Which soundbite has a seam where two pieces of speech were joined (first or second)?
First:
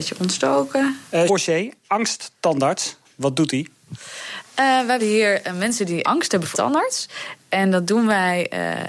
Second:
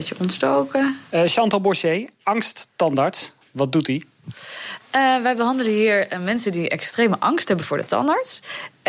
first